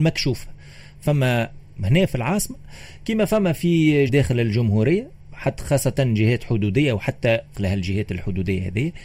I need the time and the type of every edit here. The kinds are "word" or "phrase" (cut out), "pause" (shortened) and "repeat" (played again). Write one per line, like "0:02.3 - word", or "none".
0:04.1 - word
0:07.5 - word